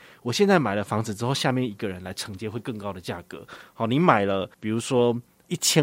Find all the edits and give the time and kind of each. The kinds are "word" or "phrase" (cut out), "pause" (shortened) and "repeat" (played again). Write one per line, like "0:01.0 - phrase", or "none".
0:04.5 - pause